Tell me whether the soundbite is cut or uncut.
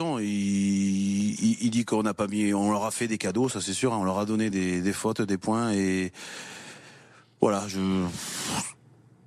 uncut